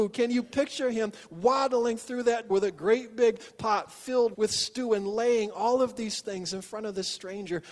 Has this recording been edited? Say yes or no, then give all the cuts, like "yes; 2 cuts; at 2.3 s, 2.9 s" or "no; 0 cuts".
yes; 2 cuts; at 2.5 s, 4.3 s